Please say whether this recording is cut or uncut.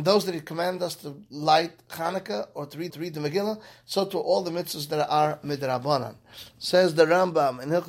cut